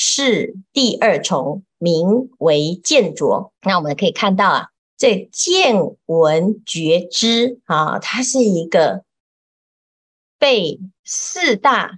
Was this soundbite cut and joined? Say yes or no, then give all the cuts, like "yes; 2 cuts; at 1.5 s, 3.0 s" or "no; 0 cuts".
yes; 3 cuts; at 3.6 s, 4.8 s, 11.0 s